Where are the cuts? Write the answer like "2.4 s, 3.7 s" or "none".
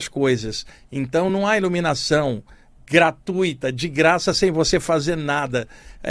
none